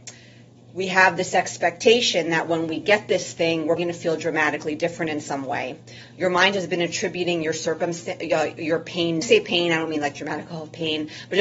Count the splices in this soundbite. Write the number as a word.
two